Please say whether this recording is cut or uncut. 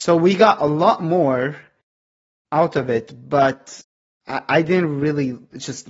uncut